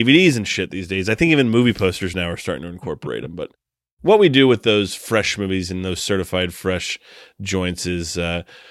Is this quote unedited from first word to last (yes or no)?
yes